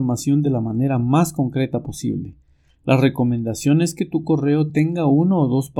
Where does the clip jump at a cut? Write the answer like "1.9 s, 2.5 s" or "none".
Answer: none